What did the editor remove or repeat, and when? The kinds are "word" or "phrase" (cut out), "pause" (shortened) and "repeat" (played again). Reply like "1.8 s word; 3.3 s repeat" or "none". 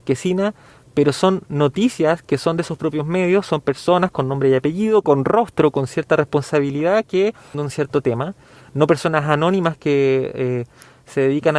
7.5 s word